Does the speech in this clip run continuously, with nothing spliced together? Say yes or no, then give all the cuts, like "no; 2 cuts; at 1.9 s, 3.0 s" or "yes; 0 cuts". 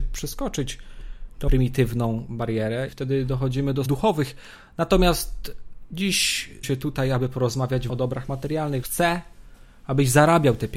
no; 6 cuts; at 1.5 s, 2.9 s, 3.9 s, 6.6 s, 7.9 s, 8.8 s